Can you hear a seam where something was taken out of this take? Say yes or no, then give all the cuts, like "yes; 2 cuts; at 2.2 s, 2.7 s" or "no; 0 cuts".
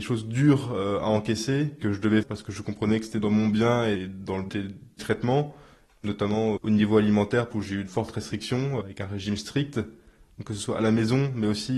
yes; 8 cuts; at 1.8 s, 2.2 s, 4.5 s, 5.0 s, 6.6 s, 7.5 s, 7.9 s, 8.8 s